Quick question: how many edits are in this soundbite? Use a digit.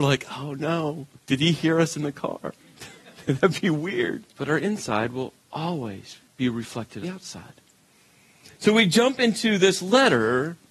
5